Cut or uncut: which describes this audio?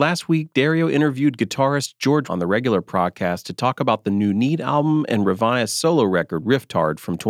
cut